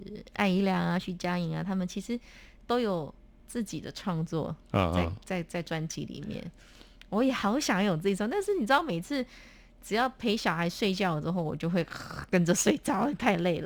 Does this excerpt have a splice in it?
no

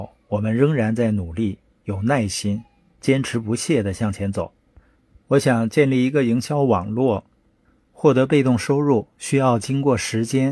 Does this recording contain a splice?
no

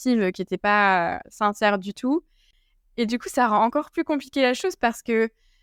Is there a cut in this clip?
no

